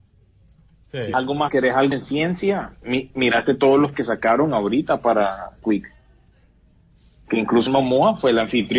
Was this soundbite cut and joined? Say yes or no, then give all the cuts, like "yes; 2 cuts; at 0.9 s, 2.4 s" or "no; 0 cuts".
yes; 6 cuts; at 1.1 s, 1.5 s, 1.9 s, 3.9 s, 5.6 s, 7.7 s